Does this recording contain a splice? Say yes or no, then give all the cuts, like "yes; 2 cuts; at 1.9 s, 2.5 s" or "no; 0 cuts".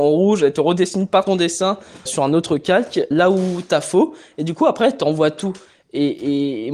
yes; 3 cuts; at 1.3 s, 2.1 s, 3.1 s